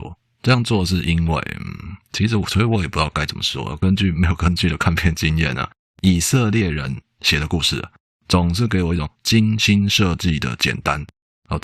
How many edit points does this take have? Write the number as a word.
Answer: zero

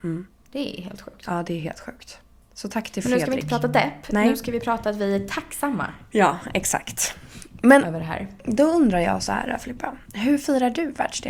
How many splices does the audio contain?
zero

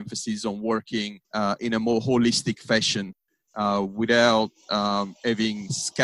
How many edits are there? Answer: one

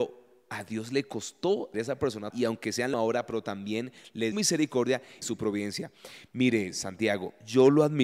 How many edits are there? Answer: five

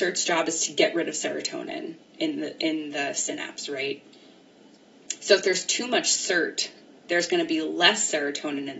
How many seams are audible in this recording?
zero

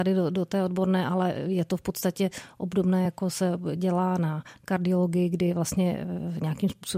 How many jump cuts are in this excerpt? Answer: zero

